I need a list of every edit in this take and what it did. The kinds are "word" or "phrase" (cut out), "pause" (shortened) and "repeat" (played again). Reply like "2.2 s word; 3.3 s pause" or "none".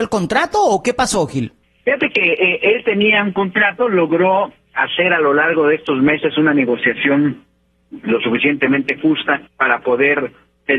9.5 s pause